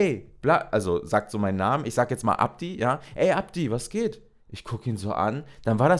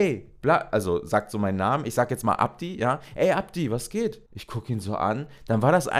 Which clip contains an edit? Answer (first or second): second